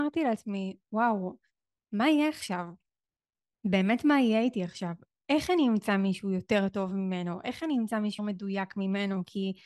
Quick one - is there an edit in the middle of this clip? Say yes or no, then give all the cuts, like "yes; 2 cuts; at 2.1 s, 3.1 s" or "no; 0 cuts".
yes; 1 cut; at 8.2 s